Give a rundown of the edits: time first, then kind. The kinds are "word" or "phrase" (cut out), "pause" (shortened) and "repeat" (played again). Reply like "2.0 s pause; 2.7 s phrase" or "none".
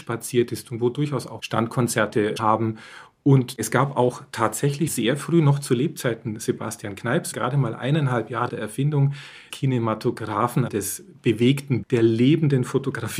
1.4 s word; 2.4 s word; 4.9 s word; 7.3 s word; 8.5 s word; 9.5 s word; 10.7 s word; 11.8 s word